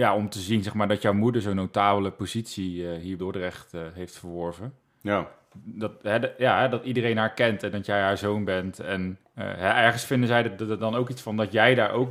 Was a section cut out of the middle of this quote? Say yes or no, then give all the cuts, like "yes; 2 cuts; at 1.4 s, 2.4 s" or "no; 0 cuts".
yes; 3 cuts; at 3.2 s, 4.8 s, 9.2 s